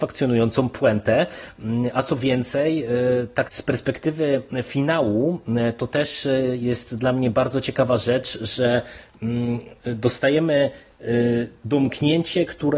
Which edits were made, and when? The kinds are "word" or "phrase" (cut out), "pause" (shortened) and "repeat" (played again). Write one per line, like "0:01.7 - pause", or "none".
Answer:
0:03.5 - word